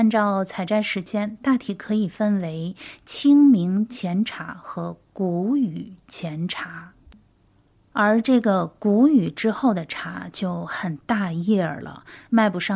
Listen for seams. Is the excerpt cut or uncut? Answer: uncut